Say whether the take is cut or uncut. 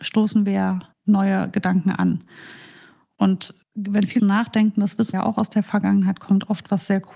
cut